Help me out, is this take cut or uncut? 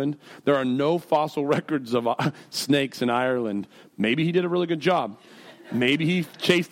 uncut